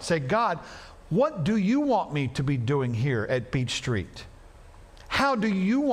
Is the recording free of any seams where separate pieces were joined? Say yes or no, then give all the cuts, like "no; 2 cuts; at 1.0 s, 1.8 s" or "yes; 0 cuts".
yes; 0 cuts